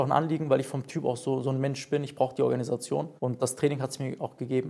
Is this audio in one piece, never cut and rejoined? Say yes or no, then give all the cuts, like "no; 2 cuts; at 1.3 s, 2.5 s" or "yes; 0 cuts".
no; 1 cut; at 3.2 s